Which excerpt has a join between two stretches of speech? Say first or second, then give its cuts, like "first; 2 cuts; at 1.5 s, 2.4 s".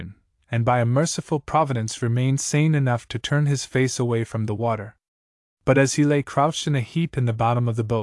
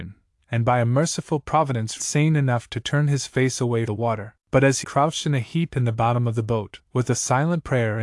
second; 5 cuts; at 2.0 s, 3.9 s, 4.4 s, 4.8 s, 6.9 s